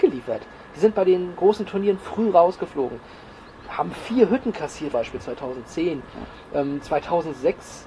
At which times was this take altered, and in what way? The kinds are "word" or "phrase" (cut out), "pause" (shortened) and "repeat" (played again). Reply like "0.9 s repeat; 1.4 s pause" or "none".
4.9 s phrase